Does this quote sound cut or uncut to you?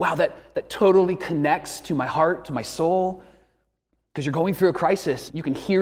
uncut